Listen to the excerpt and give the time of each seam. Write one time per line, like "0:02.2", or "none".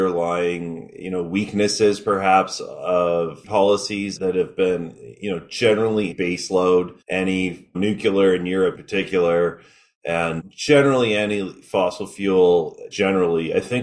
0:03.4
0:04.2
0:06.1
0:07.0
0:07.7
0:08.7
0:10.4
0:12.9